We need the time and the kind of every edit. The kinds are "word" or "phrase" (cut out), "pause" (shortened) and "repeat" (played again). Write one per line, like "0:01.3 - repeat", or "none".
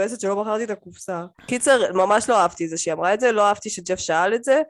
0:01.3 - pause